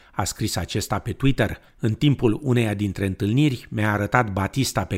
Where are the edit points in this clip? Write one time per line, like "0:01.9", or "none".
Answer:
0:01.7